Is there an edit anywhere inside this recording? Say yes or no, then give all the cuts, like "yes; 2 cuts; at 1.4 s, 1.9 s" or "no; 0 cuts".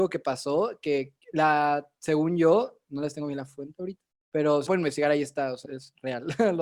yes; 4 cuts; at 1.2 s, 4.1 s, 4.7 s, 5.6 s